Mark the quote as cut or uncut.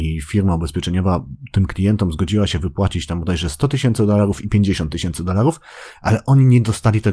uncut